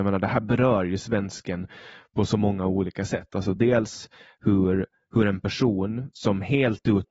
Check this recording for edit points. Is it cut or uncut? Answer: uncut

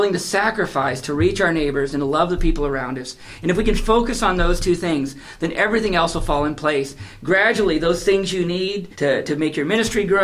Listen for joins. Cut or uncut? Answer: cut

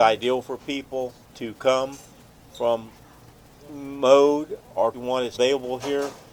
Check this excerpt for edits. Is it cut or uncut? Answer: cut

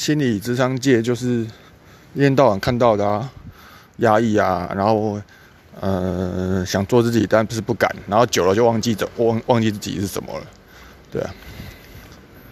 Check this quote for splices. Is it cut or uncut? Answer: uncut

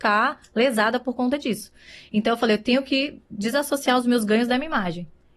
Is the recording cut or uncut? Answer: uncut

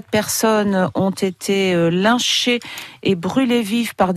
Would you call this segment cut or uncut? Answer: uncut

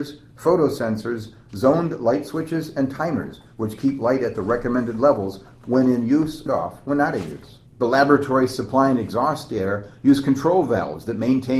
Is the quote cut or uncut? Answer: cut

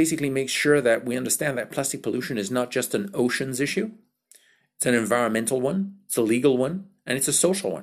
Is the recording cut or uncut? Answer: uncut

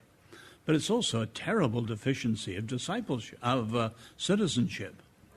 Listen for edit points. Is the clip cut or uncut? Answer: uncut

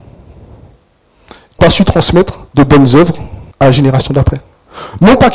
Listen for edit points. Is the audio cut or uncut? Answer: cut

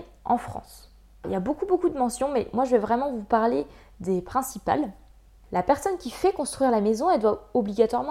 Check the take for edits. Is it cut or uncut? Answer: uncut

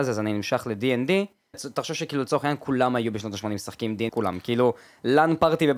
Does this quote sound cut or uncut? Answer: cut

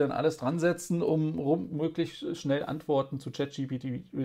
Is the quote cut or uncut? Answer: uncut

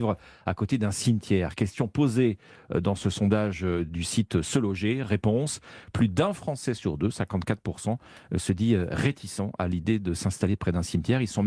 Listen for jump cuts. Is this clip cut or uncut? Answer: uncut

